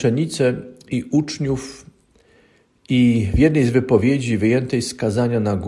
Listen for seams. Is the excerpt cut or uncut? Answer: uncut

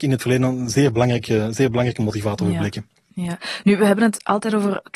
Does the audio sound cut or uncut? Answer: uncut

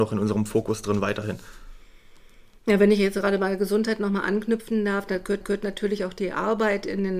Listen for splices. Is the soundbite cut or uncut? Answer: cut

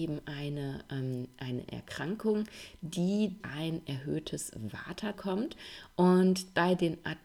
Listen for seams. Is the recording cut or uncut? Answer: cut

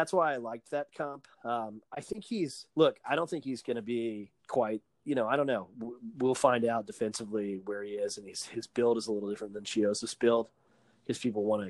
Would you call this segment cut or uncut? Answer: cut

